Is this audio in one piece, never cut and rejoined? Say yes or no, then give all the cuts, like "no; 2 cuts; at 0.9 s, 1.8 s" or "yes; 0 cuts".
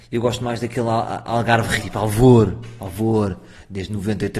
no; 1 cut; at 1.8 s